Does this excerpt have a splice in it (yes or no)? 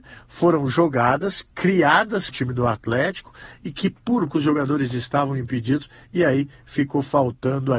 yes